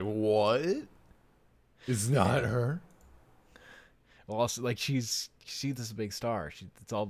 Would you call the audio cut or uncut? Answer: uncut